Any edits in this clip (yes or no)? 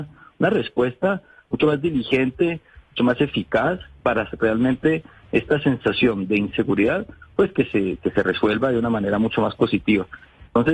no